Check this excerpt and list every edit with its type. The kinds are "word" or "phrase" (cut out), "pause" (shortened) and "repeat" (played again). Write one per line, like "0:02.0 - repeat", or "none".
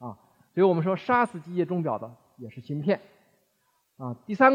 none